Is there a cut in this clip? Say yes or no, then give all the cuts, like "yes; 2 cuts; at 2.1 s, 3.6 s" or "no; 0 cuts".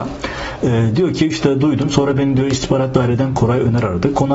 no; 0 cuts